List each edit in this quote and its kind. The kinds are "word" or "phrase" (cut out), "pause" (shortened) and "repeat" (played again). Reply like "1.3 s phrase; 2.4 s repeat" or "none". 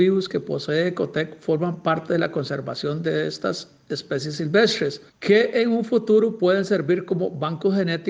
5.1 s pause